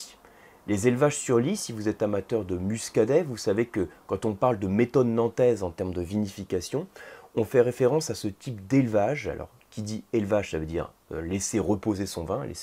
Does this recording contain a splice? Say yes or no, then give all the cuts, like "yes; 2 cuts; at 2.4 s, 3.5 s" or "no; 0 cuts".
no; 0 cuts